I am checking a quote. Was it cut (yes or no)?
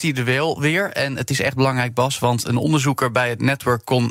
no